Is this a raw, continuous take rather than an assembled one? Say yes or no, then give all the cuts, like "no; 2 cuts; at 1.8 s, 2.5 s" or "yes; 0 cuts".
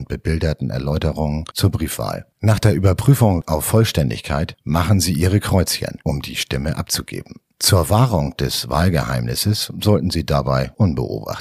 no; 1 cut; at 2.3 s